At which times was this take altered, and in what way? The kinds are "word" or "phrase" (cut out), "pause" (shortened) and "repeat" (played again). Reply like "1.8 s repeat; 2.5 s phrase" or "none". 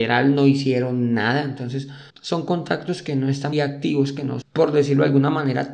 2.1 s word; 3.5 s word; 4.4 s word